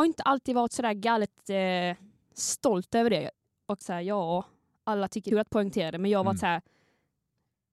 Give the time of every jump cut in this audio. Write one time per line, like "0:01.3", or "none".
0:03.8
0:05.3

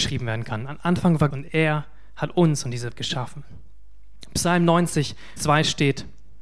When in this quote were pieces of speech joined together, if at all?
0:01.3
0:02.9
0:05.4

